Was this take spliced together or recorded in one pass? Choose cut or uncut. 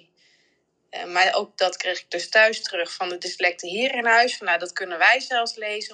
uncut